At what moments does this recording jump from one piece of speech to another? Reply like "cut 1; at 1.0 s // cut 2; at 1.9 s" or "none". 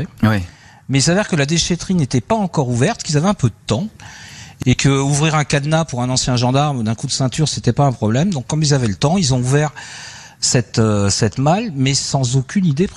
none

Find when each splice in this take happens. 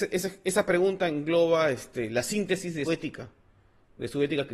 cut 1; at 2.9 s

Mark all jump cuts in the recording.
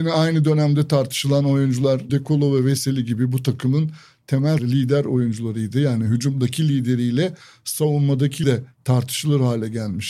cut 1; at 2.1 s // cut 2; at 4.6 s // cut 3; at 8.4 s

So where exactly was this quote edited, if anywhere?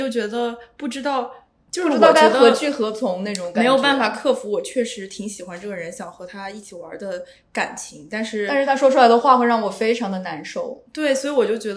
none

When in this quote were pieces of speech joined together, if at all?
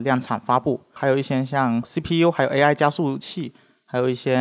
none

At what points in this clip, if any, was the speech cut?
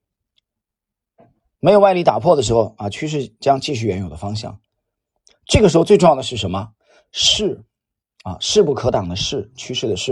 none

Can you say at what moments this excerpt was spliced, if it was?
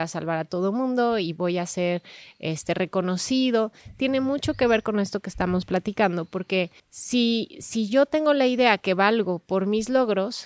cut 1; at 6.8 s

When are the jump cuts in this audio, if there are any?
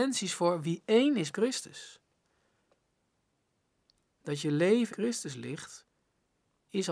cut 1; at 1.3 s // cut 2; at 4.9 s

